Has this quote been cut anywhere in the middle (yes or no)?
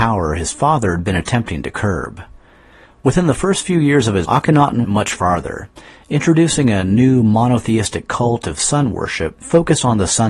yes